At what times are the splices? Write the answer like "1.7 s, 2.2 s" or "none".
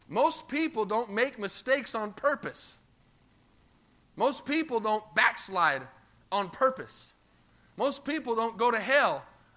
none